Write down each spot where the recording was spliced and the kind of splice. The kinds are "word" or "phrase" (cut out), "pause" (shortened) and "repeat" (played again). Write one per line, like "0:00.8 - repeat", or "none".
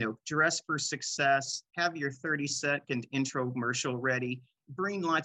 0:01.7 - pause